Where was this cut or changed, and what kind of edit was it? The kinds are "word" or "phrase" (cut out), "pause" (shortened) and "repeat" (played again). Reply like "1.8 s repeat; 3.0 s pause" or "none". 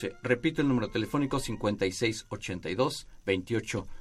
none